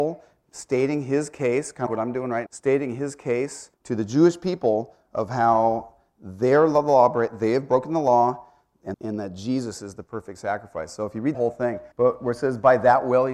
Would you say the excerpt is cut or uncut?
cut